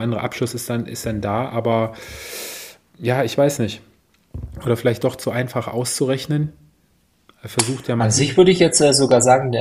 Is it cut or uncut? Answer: uncut